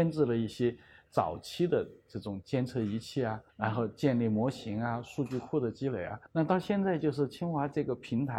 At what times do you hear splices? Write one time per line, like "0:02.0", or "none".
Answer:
0:03.5
0:06.3